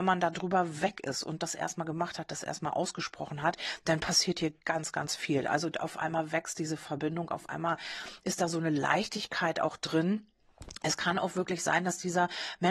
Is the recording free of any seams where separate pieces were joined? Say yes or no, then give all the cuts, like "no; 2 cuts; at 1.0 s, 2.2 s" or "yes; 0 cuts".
yes; 0 cuts